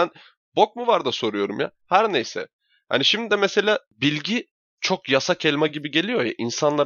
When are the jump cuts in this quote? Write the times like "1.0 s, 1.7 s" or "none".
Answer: none